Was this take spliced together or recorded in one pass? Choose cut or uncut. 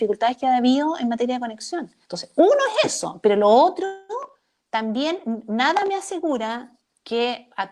cut